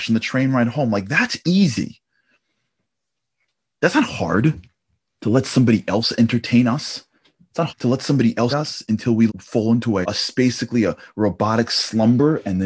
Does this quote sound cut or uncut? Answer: cut